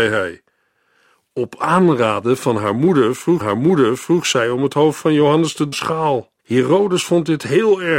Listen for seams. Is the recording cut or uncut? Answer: cut